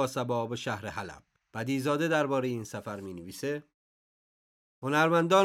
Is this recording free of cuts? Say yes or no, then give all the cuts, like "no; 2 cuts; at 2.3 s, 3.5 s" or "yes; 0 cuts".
no; 1 cut; at 1.4 s